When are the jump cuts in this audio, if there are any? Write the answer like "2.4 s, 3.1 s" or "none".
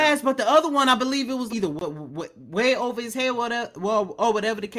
1.5 s